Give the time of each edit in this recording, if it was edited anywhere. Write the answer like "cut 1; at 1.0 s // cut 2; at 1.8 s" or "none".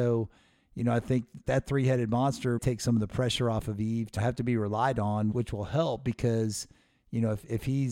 cut 1; at 1.4 s // cut 2; at 2.6 s // cut 3; at 4.2 s // cut 4; at 5.3 s